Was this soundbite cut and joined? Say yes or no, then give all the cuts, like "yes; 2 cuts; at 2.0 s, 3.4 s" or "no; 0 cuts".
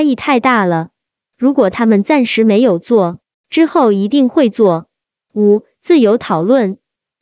no; 0 cuts